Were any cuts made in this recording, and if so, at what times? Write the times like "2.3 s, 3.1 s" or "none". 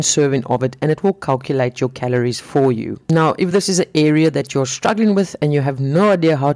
none

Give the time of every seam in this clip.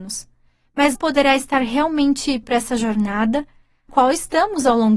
0.9 s, 2.4 s, 3.9 s

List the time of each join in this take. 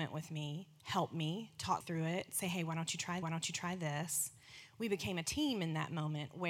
1.8 s, 3.2 s

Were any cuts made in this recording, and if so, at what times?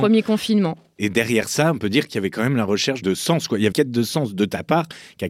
3.7 s

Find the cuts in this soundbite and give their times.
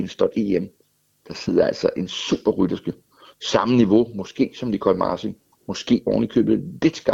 none

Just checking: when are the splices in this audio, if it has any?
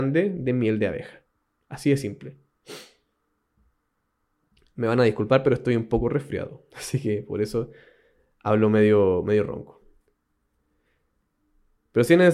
none

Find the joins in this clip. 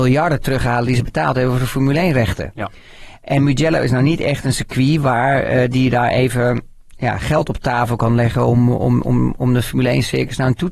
none

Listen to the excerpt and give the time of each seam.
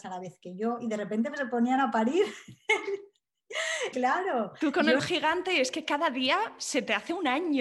3.9 s, 5.0 s

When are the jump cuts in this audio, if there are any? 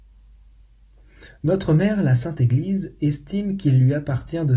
none

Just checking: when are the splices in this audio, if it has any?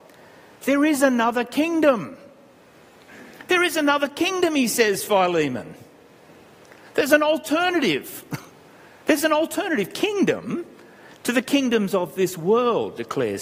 none

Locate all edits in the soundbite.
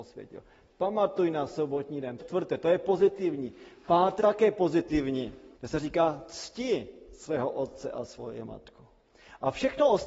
2.2 s, 4.2 s, 5.5 s

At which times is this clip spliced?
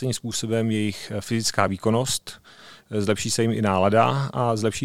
none

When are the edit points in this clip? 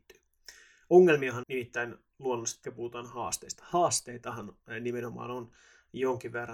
1.4 s, 2.6 s

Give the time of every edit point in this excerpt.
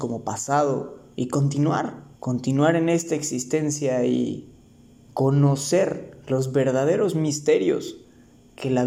1.1 s, 2.1 s, 4.6 s

